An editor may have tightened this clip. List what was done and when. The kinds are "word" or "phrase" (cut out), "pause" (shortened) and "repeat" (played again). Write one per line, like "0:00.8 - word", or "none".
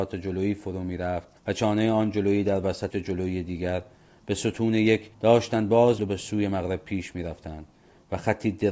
0:01.4 - pause
0:02.9 - word
0:05.1 - pause
0:06.0 - word